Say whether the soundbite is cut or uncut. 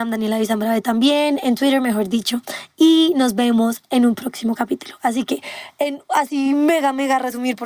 uncut